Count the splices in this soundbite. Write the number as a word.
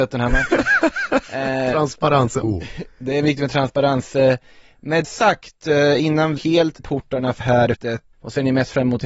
eight